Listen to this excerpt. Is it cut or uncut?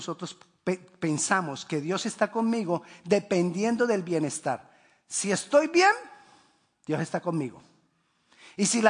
uncut